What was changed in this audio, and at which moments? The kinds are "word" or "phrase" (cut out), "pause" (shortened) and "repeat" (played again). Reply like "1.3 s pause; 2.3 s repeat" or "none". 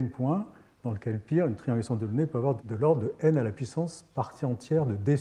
2.6 s word